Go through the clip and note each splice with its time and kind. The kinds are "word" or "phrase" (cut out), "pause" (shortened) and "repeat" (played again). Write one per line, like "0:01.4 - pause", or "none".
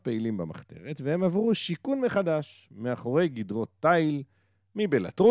none

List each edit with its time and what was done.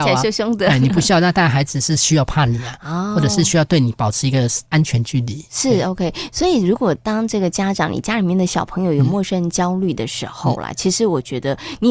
0:04.7 - pause

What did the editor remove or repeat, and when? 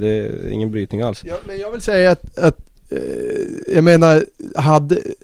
none

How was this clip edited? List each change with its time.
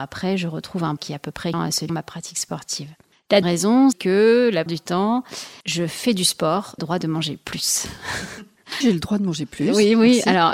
0:01.0 - word
0:01.5 - word
0:01.9 - phrase
0:03.4 - word
0:03.9 - word
0:04.7 - word
0:05.6 - pause
0:06.8 - phrase
0:08.8 - word

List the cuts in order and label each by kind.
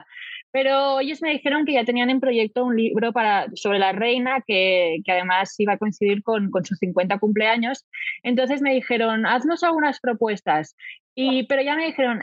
none

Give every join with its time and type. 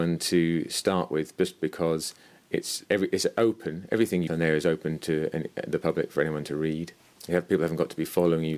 0:01.6 - word
0:02.8 - word
0:04.3 - word

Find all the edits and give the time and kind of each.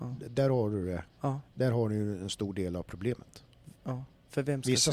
0:01.1 - pause
0:03.8 - pause

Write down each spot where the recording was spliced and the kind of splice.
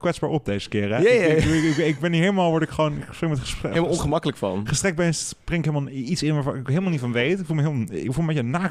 none

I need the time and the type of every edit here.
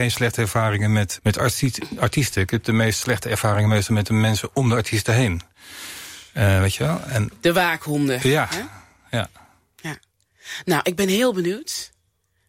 0:01.2 - word

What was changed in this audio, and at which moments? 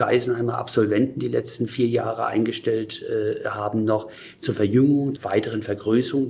0:05.2 - word

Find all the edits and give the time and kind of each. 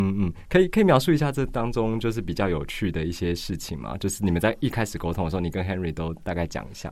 none

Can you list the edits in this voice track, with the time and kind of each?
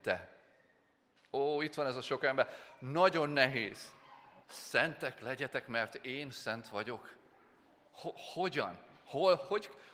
0:04.4 - pause

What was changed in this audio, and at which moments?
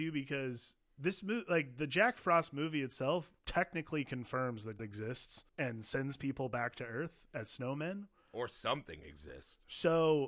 0:03.4 - pause
0:04.8 - word
0:05.5 - pause

